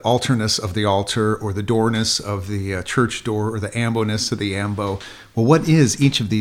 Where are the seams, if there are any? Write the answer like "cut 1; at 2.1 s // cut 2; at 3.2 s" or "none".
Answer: none